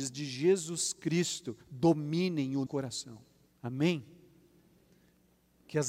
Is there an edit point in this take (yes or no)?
yes